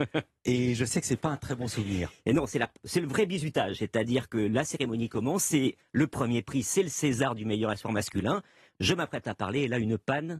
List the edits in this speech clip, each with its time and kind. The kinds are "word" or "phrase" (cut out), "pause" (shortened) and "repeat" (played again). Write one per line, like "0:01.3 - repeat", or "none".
none